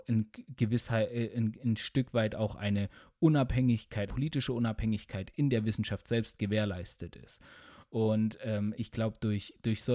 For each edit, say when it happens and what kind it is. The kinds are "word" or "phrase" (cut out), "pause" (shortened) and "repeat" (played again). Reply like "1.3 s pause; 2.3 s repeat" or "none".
4.1 s word; 8.7 s word